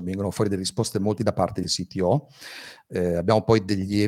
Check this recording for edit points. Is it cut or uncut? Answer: cut